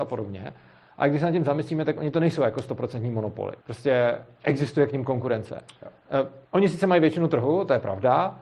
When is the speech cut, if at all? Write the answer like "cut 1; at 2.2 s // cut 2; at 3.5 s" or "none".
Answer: cut 1; at 3.6 s // cut 2; at 6.4 s